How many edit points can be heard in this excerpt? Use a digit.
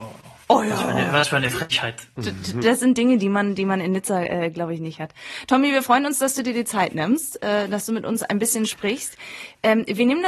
0